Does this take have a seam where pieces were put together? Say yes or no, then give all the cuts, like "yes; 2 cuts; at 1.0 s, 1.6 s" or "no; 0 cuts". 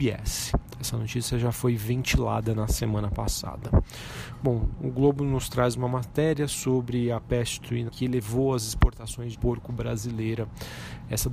yes; 2 cuts; at 7.9 s, 9.3 s